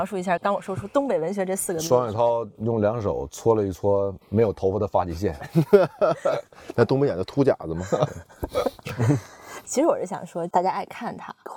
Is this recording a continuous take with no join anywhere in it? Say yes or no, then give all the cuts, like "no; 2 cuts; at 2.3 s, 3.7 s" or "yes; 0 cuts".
no; 1 cut; at 4.2 s